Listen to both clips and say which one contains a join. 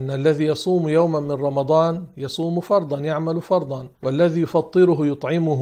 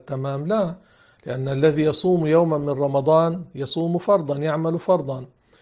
first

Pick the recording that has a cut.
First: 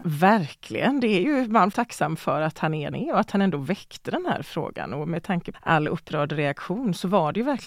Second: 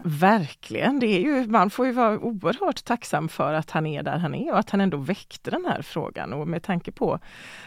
first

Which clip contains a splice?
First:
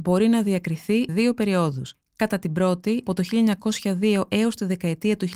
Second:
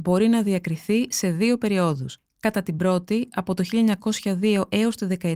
first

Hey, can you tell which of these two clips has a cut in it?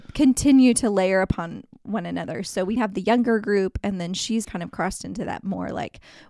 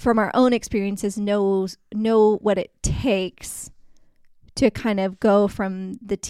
first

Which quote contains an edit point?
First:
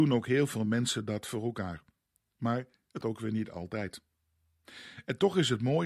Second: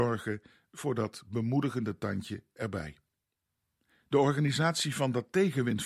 first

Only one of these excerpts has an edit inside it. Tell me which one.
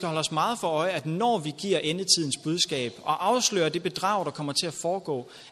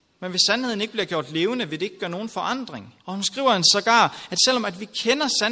second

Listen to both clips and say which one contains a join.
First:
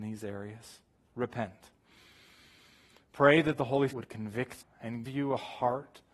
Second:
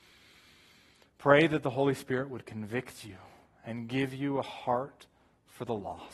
first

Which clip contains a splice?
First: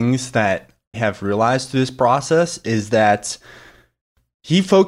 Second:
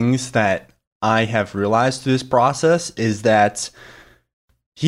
first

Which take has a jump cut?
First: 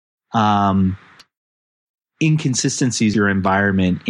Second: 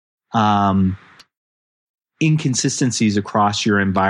first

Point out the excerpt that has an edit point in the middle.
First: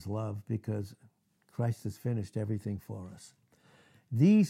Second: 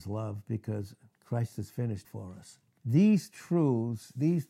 second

